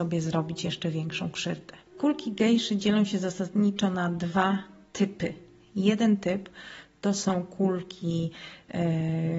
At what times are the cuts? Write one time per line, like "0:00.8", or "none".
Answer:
none